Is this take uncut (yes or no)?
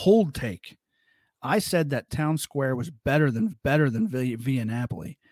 no